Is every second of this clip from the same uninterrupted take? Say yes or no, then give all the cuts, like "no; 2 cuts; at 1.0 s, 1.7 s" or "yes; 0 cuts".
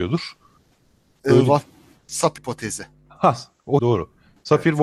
no; 2 cuts; at 2.4 s, 3.8 s